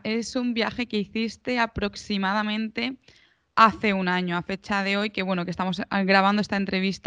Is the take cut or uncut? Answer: uncut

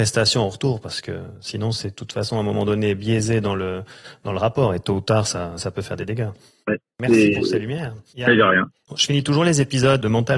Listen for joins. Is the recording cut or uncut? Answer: uncut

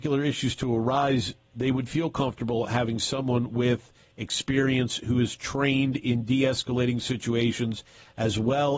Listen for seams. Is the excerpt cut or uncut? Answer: uncut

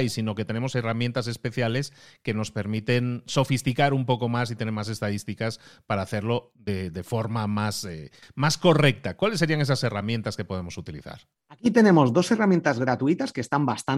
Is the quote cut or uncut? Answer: uncut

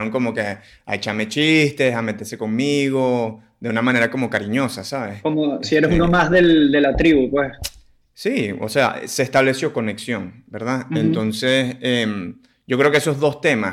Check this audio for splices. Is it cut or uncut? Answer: uncut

